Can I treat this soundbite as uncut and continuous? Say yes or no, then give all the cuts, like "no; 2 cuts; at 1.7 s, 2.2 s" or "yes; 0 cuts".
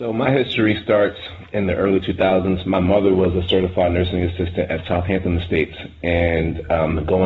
yes; 0 cuts